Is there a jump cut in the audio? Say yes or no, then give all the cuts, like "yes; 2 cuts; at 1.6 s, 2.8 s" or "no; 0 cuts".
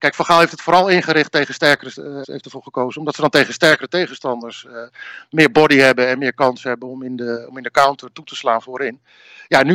yes; 1 cut; at 2.2 s